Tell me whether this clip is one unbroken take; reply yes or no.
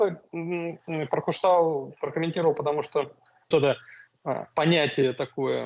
no